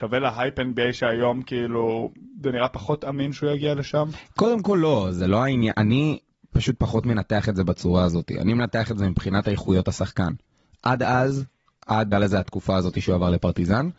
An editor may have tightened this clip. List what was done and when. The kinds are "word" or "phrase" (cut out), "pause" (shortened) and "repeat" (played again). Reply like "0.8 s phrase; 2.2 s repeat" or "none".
5.7 s word; 12.1 s word

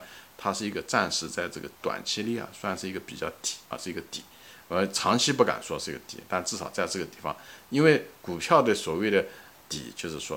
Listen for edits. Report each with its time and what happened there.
1.8 s pause; 3.7 s pause

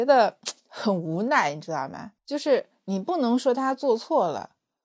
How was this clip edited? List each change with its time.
2.2 s pause

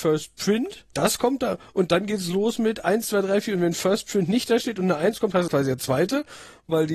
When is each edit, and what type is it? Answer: 0.9 s word; 5.5 s word

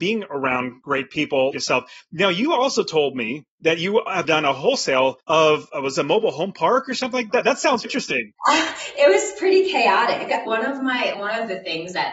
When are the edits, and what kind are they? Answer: 1.5 s word; 3.5 s pause; 4.2 s word; 5.2 s pause; 7.3 s phrase; 7.8 s word; 8.4 s pause; 10.5 s word; 11.1 s word

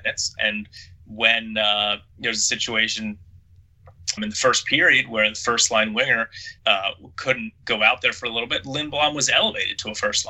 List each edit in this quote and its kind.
4.2 s word; 6.6 s pause

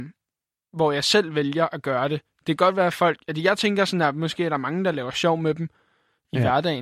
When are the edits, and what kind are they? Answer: none

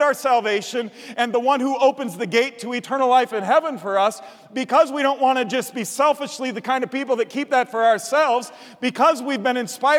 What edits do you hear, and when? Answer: none

